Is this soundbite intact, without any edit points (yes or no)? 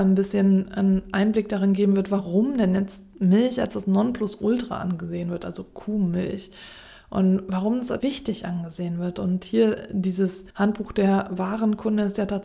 no